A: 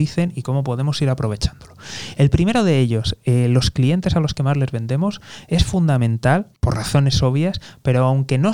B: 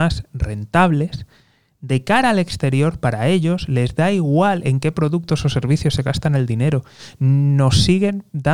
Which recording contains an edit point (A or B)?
A